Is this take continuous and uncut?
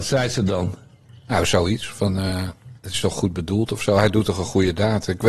no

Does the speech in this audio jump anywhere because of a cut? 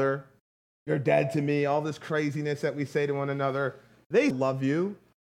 yes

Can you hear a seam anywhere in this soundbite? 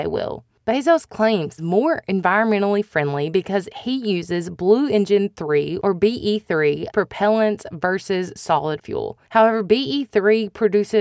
yes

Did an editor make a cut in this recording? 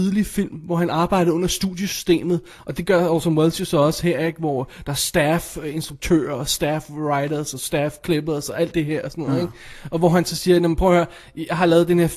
no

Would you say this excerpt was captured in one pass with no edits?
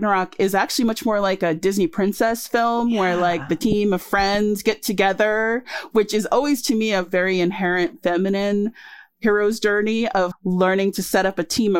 no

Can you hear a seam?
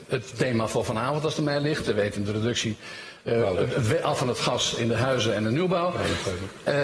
no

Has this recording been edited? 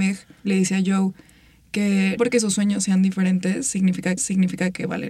yes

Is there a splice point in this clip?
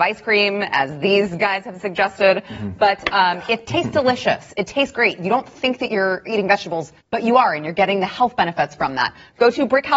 yes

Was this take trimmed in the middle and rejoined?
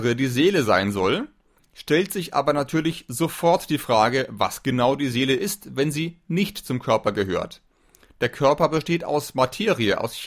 no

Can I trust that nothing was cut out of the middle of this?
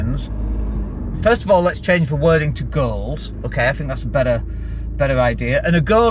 yes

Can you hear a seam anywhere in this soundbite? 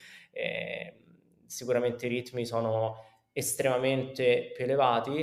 no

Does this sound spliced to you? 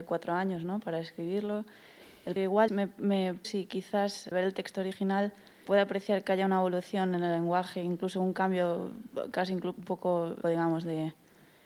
yes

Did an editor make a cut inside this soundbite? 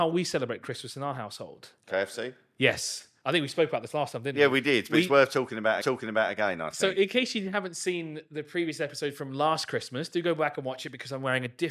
yes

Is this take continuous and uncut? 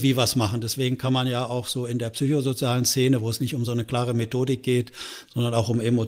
yes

